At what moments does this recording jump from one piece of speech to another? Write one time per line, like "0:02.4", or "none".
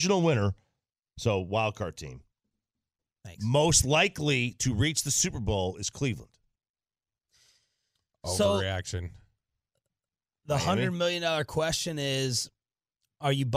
none